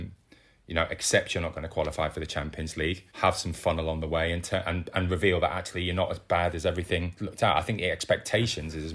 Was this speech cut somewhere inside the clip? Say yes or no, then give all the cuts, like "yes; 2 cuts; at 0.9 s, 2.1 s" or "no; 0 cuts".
yes; 1 cut; at 3.1 s